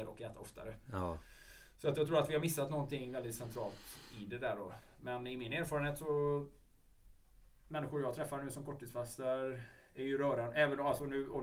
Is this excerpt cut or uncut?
uncut